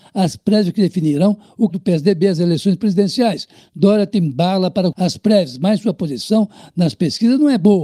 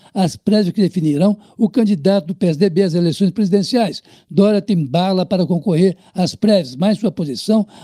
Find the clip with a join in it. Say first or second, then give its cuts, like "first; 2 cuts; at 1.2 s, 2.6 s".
first; 2 cuts; at 1.7 s, 4.9 s